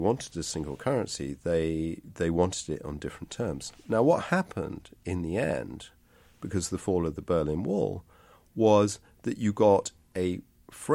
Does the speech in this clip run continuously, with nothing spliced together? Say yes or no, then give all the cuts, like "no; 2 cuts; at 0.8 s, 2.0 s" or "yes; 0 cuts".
yes; 0 cuts